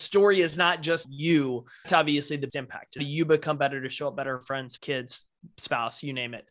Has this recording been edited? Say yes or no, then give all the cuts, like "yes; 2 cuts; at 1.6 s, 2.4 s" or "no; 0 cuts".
yes; 6 cuts; at 1.0 s, 1.8 s, 2.5 s, 3.0 s, 4.4 s, 4.8 s